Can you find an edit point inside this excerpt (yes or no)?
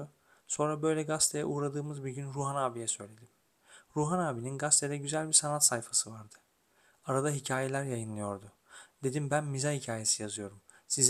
no